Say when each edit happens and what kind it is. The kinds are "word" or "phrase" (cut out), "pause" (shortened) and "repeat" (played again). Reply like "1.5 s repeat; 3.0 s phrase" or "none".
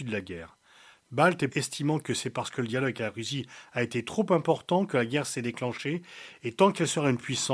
1.5 s word

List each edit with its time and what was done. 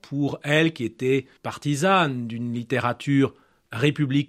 1.4 s pause

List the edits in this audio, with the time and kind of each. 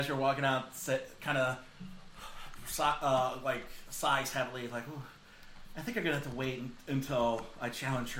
none

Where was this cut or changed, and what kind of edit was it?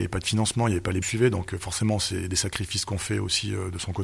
1.0 s phrase

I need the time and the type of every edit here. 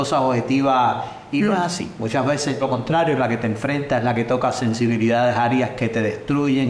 2.6 s word

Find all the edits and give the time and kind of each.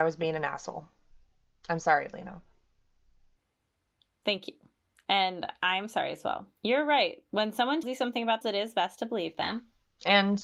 6.6 s pause; 7.8 s word; 8.4 s word

